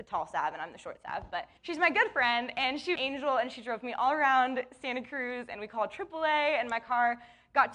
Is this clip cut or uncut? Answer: cut